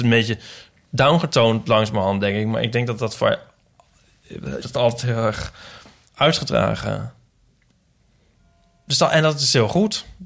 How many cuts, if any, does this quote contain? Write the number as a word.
one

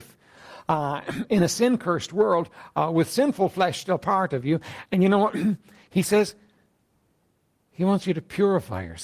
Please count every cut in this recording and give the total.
zero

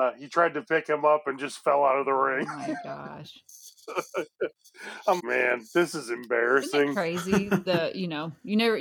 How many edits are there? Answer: one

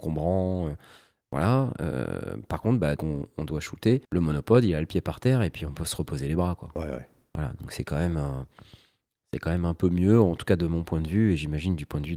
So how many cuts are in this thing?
two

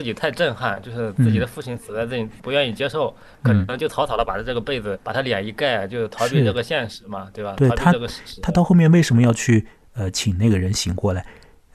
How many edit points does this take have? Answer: two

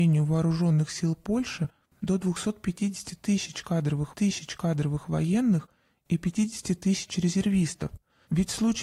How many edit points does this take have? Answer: one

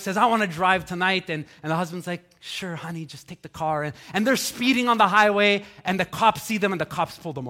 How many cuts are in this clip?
zero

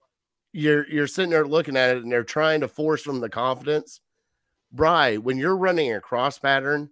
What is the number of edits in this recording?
one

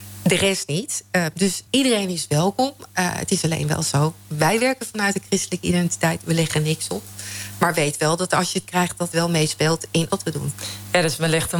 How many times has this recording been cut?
three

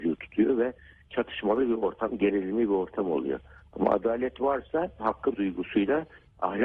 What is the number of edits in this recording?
two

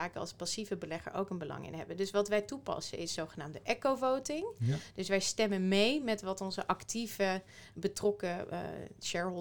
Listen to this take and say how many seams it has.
zero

